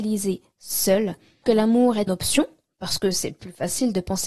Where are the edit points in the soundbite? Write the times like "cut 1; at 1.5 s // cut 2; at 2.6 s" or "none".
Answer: cut 1; at 1.4 s // cut 2; at 2.1 s